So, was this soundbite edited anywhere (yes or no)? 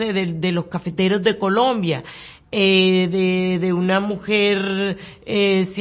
no